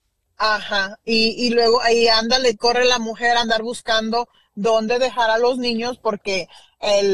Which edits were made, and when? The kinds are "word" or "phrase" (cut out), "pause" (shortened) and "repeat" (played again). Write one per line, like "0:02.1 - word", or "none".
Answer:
none